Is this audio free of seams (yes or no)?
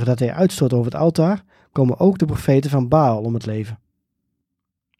yes